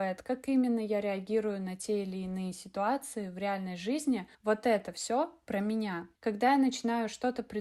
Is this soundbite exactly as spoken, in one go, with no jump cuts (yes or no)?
no